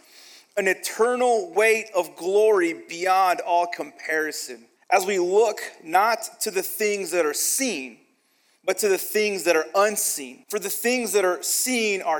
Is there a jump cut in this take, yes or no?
yes